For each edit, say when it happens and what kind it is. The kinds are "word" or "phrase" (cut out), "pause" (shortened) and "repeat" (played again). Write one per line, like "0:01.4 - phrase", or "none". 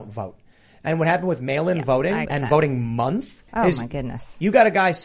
0:02.3 - word
0:03.5 - pause